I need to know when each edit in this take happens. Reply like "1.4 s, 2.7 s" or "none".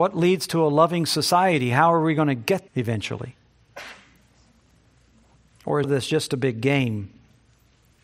2.7 s, 5.8 s